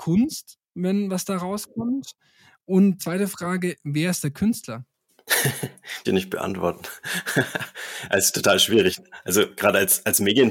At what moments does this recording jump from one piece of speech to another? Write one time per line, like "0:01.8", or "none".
0:03.0
0:06.0